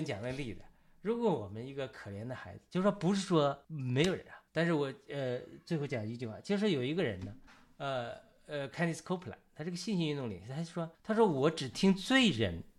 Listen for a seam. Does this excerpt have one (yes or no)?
yes